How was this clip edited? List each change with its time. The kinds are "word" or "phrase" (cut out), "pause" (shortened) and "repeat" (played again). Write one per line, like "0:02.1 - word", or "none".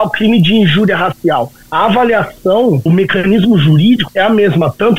0:02.9 - word
0:04.1 - word